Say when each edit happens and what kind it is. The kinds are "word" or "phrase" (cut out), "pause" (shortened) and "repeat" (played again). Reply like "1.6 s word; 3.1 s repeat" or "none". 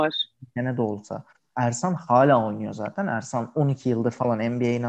none